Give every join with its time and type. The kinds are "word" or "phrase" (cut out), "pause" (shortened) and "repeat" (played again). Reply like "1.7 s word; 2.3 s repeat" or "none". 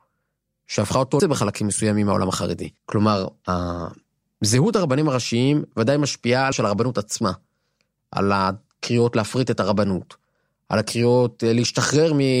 1.2 s word; 2.8 s pause; 6.5 s word